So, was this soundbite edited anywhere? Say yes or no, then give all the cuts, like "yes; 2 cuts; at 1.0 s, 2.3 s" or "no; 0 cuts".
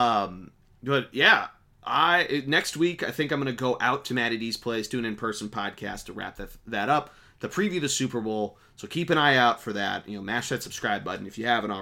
no; 0 cuts